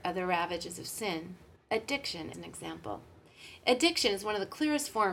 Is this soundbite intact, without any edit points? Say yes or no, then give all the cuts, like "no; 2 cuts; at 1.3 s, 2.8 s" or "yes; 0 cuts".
no; 2 cuts; at 1.6 s, 2.3 s